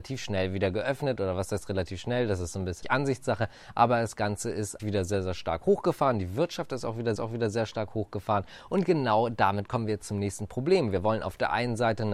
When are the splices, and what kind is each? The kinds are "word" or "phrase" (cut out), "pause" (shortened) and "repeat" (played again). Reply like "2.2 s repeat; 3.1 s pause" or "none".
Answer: 2.8 s word; 4.8 s word; 7.2 s repeat